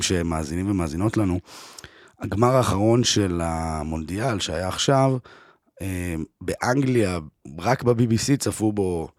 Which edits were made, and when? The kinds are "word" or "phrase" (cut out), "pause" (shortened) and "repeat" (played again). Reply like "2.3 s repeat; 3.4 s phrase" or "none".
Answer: none